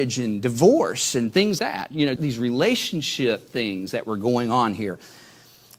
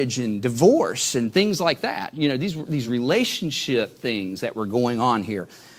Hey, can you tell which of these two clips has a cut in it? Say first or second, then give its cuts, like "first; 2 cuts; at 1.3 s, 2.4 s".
first; 2 cuts; at 1.6 s, 2.2 s